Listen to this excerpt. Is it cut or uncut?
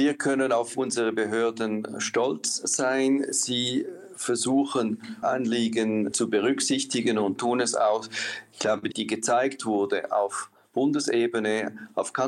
cut